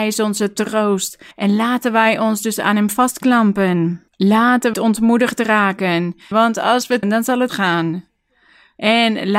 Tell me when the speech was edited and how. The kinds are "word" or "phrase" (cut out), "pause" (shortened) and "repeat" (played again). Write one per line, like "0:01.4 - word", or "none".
0:01.3 - pause
0:04.1 - pause
0:04.7 - word
0:06.3 - phrase
0:07.0 - word
0:07.5 - phrase